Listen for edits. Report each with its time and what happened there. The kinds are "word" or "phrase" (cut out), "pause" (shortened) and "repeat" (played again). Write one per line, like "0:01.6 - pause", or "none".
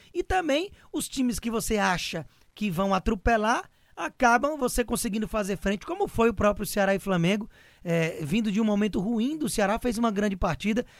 none